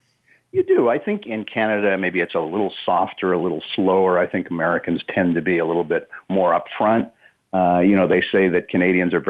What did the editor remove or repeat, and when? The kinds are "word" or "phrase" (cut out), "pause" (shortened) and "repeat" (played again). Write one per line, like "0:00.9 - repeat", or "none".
0:01.2 - word